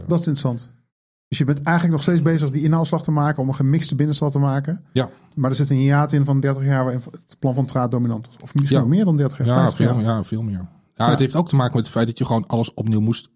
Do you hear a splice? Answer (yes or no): no